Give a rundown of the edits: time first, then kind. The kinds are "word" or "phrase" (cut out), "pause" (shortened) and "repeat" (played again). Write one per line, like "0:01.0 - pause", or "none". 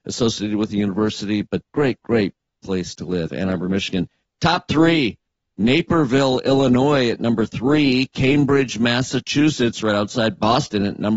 none